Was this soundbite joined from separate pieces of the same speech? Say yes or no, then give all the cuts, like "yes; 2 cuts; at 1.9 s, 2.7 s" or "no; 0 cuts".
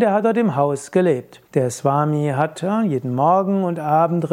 yes; 1 cut; at 1.4 s